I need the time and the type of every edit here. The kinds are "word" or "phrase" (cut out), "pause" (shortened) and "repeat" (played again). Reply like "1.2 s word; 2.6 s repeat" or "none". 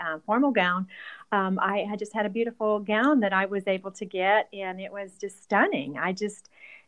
none